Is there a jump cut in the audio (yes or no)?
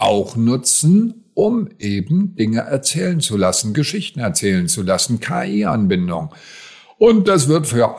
no